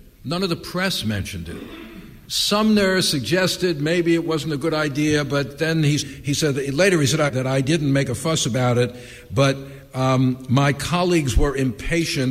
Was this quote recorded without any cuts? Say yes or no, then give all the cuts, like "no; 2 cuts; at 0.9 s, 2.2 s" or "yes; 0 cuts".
no; 3 cuts; at 2.2 s, 6.0 s, 7.3 s